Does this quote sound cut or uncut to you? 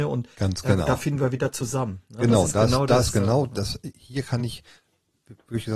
uncut